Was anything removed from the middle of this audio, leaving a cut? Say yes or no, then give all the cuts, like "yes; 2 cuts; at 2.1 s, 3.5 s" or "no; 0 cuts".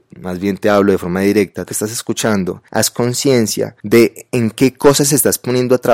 yes; 3 cuts; at 1.7 s, 2.7 s, 3.8 s